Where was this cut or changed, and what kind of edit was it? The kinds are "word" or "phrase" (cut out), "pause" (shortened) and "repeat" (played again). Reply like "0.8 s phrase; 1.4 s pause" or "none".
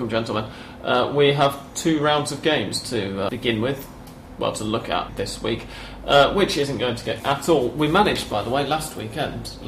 3.3 s word; 5.1 s word; 7.2 s word

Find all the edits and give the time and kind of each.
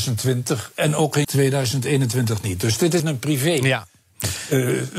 1.2 s word; 3.0 s word

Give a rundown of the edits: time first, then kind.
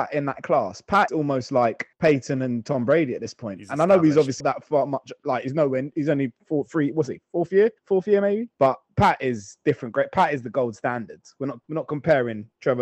1.1 s word; 1.9 s pause; 4.4 s word; 7.8 s pause; 8.5 s pause; 11.6 s pause

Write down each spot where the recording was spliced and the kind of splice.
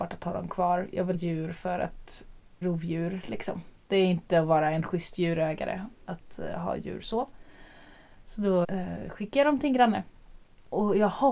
1.1 s phrase; 2.6 s word; 8.6 s word

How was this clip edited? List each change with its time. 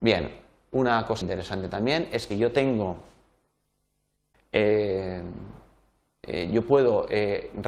1.2 s word; 2.3 s word; 4.3 s word

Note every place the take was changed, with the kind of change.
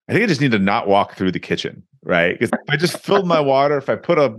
2.5 s phrase

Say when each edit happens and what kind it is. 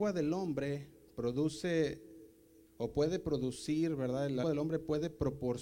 2.7 s pause; 4.4 s word

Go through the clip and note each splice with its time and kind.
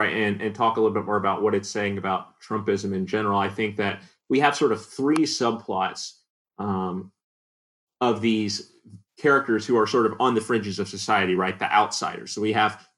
none

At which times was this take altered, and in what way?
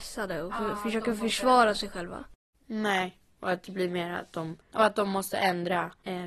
4.6 s pause

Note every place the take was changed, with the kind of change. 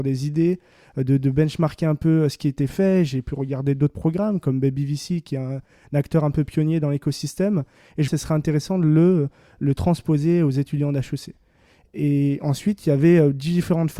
8.1 s phrase

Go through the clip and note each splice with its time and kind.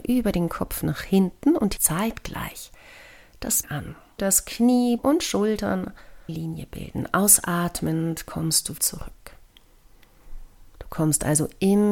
1.8 s word; 3.6 s word; 4.2 s word; 5.0 s word; 6.3 s word; 8.8 s word

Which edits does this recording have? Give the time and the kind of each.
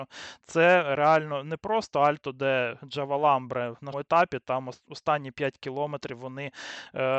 3.9 s word

